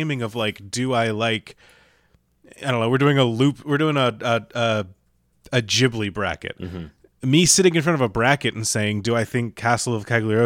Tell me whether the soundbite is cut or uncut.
uncut